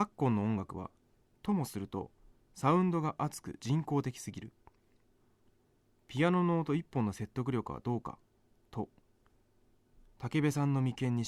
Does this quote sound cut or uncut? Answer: uncut